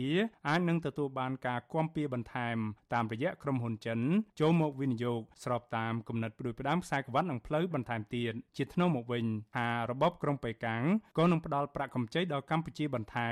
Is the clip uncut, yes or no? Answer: no